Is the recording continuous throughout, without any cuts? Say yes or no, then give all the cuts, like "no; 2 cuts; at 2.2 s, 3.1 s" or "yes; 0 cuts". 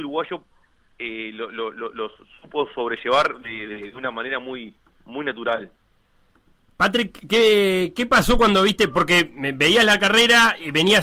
yes; 0 cuts